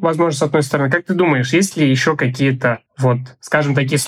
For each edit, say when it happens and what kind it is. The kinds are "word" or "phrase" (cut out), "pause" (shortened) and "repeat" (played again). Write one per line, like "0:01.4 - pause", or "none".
0:02.9 - pause